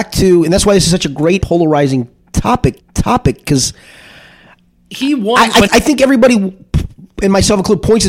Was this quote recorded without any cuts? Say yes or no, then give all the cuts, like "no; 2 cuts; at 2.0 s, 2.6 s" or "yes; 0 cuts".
no; 3 cuts; at 1.4 s, 2.8 s, 5.7 s